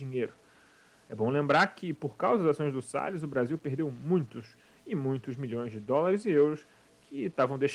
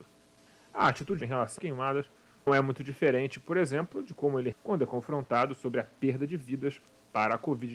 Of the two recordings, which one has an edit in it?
second; 4 cuts; at 1.2 s, 1.6 s, 2.5 s, 4.5 s

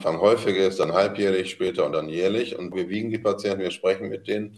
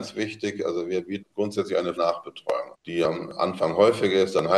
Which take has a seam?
second; 3 cuts; at 1.2 s, 2.0 s, 2.7 s

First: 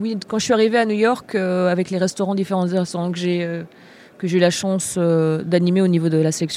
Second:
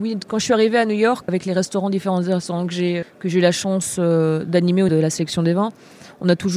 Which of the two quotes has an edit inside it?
second; 3 cuts; at 1.3 s, 3.0 s, 4.9 s

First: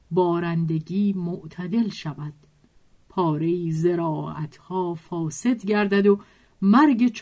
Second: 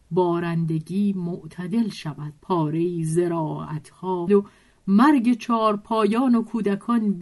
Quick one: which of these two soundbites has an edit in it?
second; 2 cuts; at 2.4 s, 4.3 s

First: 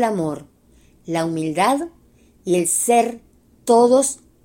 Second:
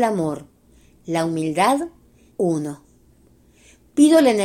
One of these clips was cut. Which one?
second; 1 cut; at 2.3 s

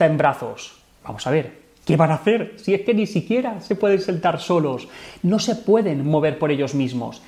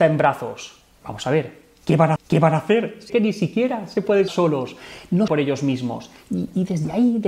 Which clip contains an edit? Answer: second; 4 cuts; at 2.2 s, 3.1 s, 4.3 s, 5.3 s

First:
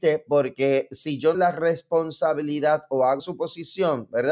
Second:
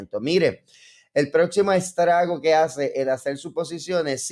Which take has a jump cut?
first; 2 cuts; at 1.3 s, 3.2 s

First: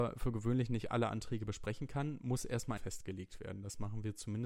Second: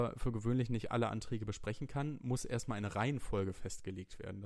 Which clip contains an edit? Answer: first; 1 cut; at 2.8 s

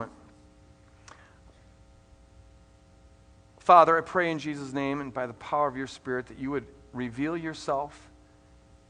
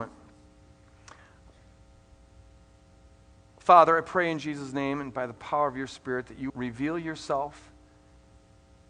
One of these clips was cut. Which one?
second; 1 cut; at 6.5 s

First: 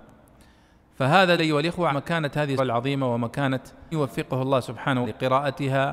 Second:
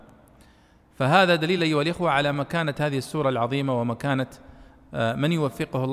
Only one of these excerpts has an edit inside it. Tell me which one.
first; 5 cuts; at 1.4 s, 1.9 s, 2.6 s, 3.9 s, 5.0 s

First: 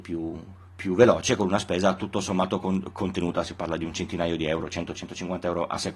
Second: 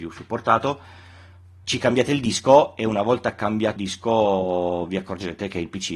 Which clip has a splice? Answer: second; 2 cuts; at 1.6 s, 3.8 s

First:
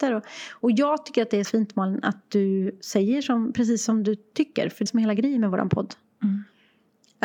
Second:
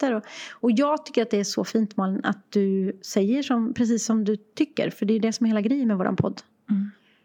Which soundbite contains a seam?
first; 2 cuts; at 1.4 s, 4.9 s

